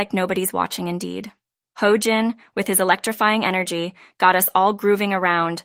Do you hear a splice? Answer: yes; 1 cut; at 1.6 s

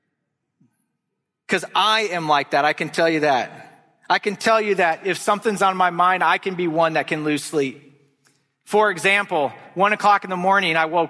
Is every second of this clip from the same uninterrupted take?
yes; 0 cuts

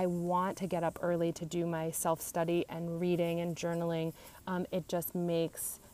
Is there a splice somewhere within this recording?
no; 0 cuts

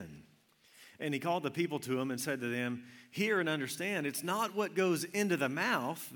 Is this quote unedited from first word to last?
yes; 0 cuts

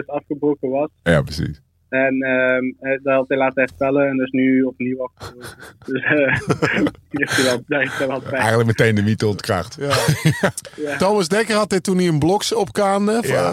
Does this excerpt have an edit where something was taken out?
no; 0 cuts

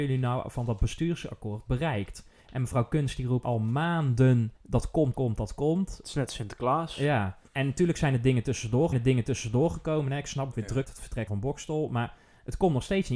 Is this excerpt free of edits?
no; 9 cuts; at 2.4 s, 3.4 s, 4.6 s, 5.1 s, 7.5 s, 8.9 s, 10.5 s, 10.8 s, 11.3 s

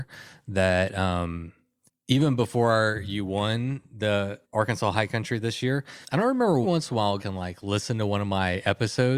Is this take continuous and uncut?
no; 5 cuts; at 1.9 s, 4.4 s, 6.0 s, 6.6 s, 7.2 s

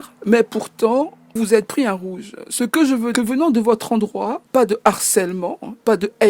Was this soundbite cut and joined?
yes; 3 cuts; at 1.4 s, 3.1 s, 4.5 s

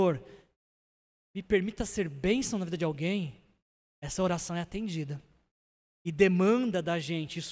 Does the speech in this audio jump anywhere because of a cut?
no; 0 cuts

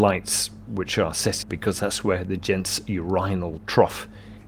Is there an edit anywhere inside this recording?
yes; 1 cut; at 1.4 s

